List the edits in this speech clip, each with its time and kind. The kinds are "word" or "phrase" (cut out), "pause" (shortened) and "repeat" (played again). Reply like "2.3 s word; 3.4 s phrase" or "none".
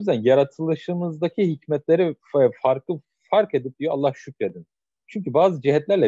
none